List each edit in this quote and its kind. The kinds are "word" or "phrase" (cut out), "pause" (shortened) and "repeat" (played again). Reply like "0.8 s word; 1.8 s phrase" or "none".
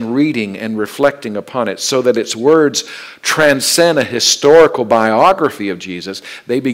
none